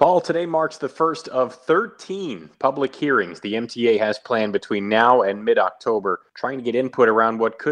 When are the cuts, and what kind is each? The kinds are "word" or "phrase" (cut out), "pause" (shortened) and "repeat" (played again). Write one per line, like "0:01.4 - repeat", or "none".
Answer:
0:06.3 - pause